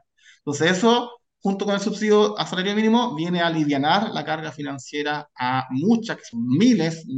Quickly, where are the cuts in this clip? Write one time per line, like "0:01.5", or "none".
none